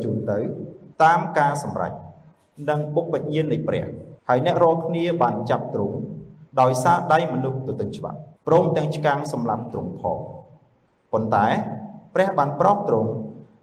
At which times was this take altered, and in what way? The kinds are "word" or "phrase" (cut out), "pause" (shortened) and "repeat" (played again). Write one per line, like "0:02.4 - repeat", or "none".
0:00.9 - pause
0:04.2 - pause
0:06.5 - pause
0:08.4 - pause